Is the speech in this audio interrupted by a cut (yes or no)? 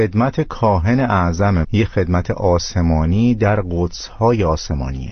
yes